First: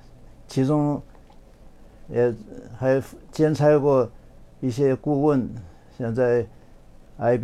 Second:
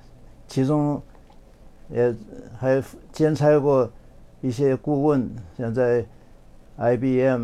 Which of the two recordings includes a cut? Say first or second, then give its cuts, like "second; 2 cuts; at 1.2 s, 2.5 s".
second; 2 cuts; at 1.8 s, 5.5 s